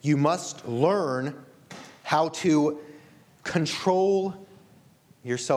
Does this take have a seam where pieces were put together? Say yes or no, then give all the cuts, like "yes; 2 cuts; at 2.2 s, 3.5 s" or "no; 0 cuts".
no; 0 cuts